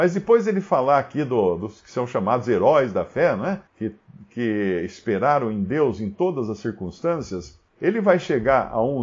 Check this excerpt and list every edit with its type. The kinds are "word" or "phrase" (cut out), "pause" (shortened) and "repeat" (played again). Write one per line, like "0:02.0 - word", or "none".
0:03.7 - pause
0:07.7 - pause

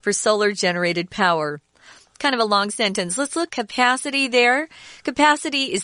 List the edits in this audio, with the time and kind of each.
0:03.5 - word

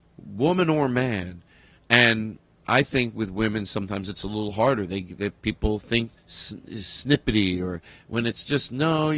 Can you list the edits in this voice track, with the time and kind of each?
0:06.2 - word

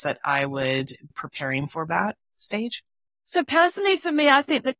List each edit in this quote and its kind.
0:01.1 - word
0:01.9 - word
0:03.1 - pause

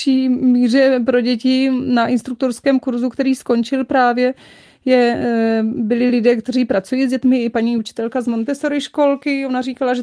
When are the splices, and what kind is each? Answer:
none

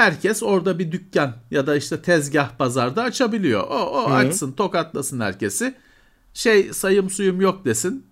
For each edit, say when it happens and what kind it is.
none

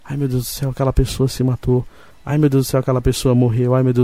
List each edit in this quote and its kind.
none

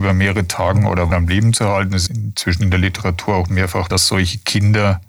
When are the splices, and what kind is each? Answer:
0:01.1 - word
0:02.1 - word
0:03.9 - word

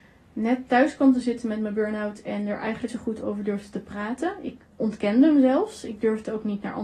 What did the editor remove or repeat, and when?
0:02.9 - word

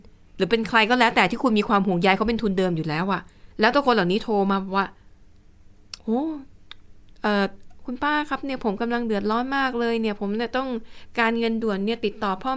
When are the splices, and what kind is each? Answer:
0:03.5 - pause
0:06.0 - pause

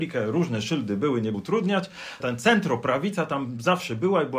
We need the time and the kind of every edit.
0:01.3 - word
0:02.2 - word

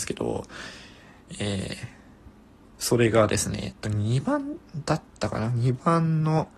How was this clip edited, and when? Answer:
0:02.6 - pause

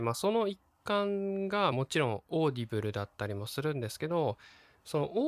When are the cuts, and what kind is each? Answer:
0:01.7 - phrase

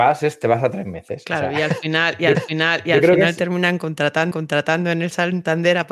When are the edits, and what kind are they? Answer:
0:02.3 - repeat
0:04.3 - repeat

